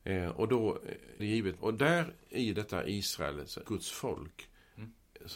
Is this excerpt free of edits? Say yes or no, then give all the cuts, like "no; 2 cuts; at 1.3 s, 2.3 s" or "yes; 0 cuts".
no; 3 cuts; at 1.2 s, 1.6 s, 3.7 s